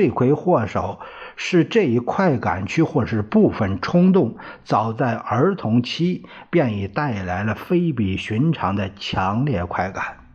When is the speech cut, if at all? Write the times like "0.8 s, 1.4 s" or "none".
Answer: none

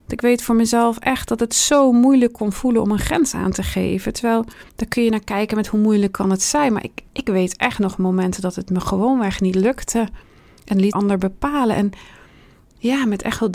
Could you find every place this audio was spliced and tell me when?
4.7 s, 7.1 s, 10.9 s

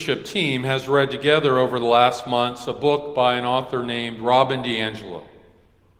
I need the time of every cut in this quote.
none

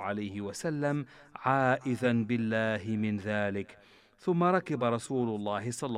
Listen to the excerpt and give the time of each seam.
none

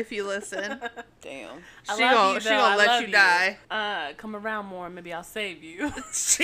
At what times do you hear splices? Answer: 3.6 s

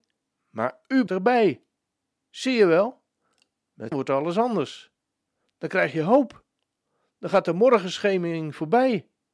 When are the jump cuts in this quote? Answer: 1.1 s, 3.9 s

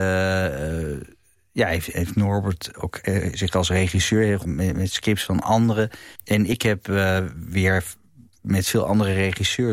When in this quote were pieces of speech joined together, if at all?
1.9 s, 4.4 s, 6.2 s

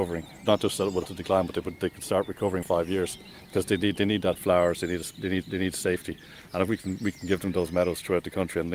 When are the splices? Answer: 1.1 s, 2.6 s, 4.3 s, 5.4 s

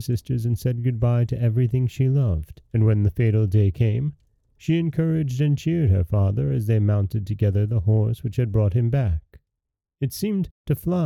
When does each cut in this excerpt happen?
2.7 s

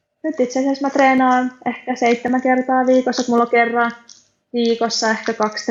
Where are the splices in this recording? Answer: none

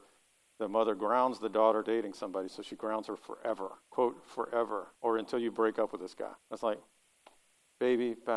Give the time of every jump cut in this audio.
1.8 s, 4.9 s, 6.4 s

